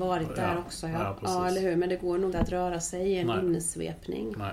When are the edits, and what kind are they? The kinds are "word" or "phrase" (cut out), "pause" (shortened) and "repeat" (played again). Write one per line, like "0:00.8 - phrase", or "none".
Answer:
0:02.3 - word